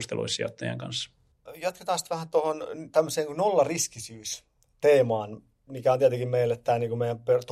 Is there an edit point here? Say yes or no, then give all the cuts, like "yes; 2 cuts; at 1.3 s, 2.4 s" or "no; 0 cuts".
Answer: no; 0 cuts